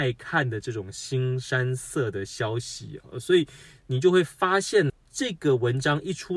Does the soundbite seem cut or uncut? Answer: cut